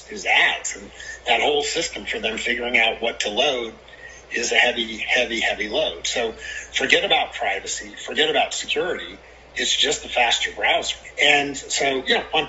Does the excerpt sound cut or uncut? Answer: uncut